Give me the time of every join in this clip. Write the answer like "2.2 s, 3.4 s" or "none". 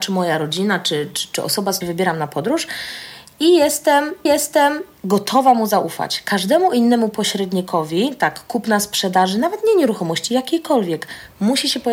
1.8 s, 4.3 s

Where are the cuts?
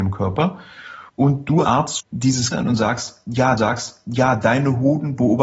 1.1 s, 1.6 s, 2.0 s, 2.5 s, 3.6 s

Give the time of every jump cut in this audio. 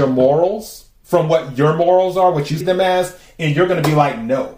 2.6 s

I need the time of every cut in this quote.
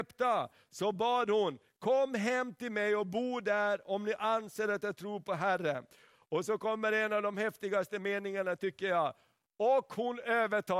none

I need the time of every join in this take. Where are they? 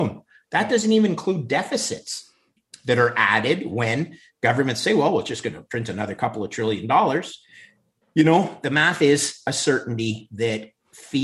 none

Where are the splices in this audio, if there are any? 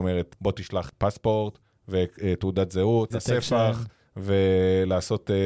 3.1 s

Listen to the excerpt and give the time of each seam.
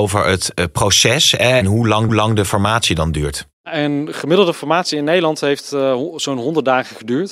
1.6 s, 2.1 s, 3.5 s

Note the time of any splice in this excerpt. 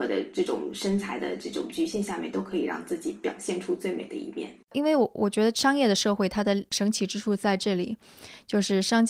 4.6 s

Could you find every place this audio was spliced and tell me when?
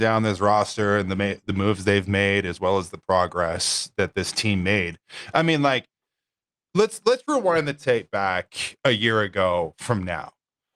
none

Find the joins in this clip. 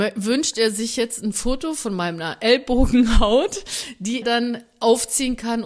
4.2 s

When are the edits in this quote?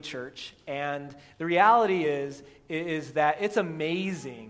none

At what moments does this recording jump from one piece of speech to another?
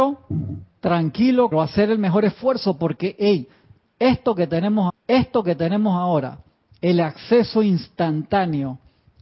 1.5 s, 4.9 s

